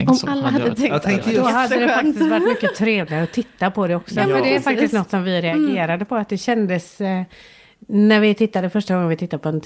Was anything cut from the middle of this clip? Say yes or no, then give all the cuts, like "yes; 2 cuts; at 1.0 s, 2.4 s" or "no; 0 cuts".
no; 0 cuts